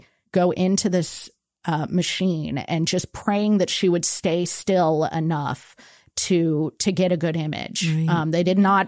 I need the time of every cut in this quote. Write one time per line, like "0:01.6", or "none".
none